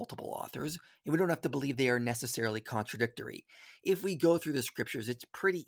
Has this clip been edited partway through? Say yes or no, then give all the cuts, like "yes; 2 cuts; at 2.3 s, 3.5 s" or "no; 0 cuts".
no; 0 cuts